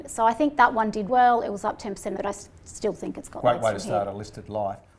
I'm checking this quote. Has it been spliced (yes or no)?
yes